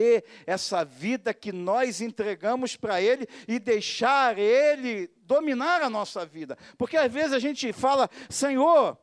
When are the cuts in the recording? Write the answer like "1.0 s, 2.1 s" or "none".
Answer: none